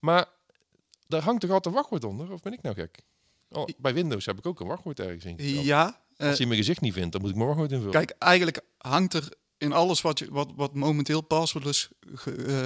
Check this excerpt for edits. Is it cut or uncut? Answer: uncut